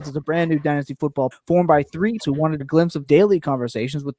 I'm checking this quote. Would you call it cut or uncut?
cut